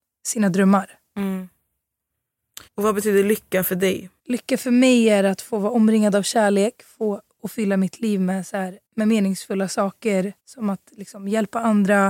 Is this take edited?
yes; 4 cuts; at 2.7 s, 4.2 s, 8.9 s, 10.4 s

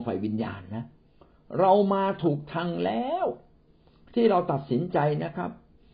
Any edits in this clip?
no; 0 cuts

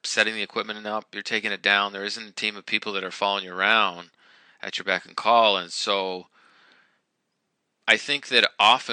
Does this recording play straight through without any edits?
yes; 0 cuts

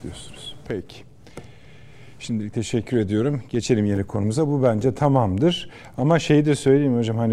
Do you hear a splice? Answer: no; 0 cuts

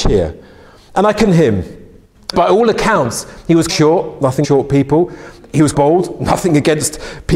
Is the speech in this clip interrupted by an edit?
yes; 5 cuts; at 1.3 s, 2.3 s, 3.7 s, 4.4 s, 5.7 s

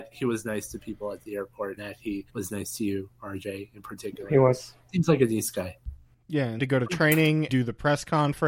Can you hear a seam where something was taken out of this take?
yes; 4 cuts; at 1.8 s, 2.3 s, 6.6 s, 7.5 s

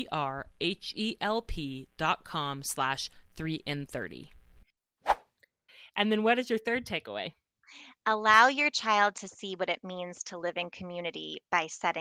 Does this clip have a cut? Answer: no; 0 cuts

